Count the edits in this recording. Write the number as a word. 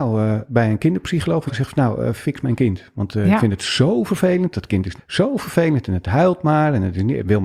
two